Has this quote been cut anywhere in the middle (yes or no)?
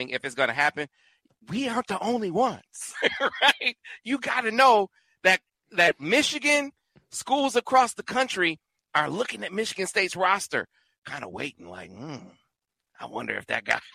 no